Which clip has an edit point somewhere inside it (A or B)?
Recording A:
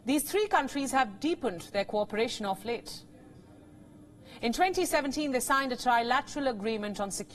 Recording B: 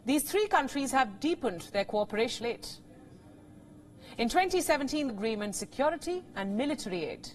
B